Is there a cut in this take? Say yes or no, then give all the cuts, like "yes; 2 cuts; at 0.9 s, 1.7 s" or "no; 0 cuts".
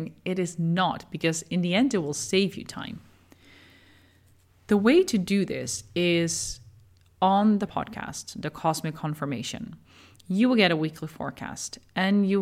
yes; 1 cut; at 7.7 s